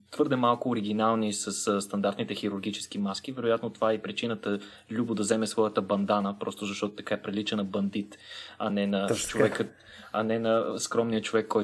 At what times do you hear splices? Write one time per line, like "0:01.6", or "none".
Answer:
none